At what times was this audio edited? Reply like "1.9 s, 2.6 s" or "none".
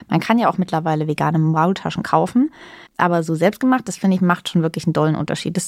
2.9 s

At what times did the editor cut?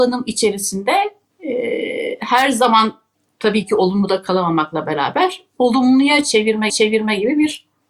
6.7 s

